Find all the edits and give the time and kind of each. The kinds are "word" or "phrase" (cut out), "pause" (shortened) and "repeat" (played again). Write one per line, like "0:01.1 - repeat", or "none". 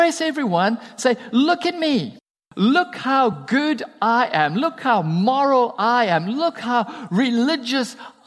none